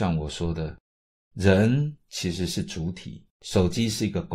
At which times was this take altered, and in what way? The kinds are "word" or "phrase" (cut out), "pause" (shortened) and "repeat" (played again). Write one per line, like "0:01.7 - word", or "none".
0:03.3 - pause